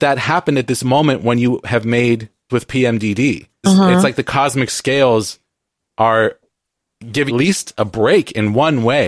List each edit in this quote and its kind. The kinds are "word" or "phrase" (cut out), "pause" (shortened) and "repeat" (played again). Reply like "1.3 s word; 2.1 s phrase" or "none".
2.5 s word; 3.6 s word; 7.3 s word